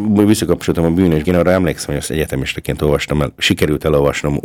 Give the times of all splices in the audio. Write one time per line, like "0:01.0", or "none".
0:01.2